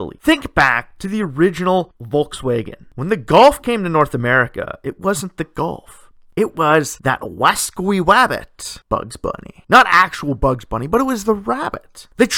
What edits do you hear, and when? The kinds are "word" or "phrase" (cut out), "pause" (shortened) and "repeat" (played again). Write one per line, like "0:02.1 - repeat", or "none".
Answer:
none